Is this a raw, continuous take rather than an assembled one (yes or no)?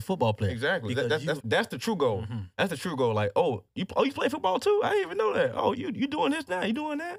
no